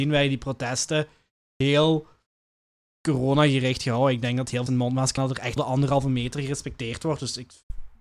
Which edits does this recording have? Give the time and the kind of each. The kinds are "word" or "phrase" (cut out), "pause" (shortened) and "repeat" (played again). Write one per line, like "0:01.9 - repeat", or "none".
0:04.7 - word
0:05.2 - word
0:05.6 - word